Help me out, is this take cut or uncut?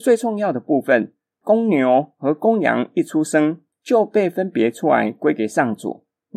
uncut